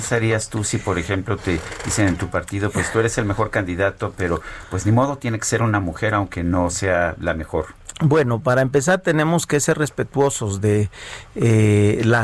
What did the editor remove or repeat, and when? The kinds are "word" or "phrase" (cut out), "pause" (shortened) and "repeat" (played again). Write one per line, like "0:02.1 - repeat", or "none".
none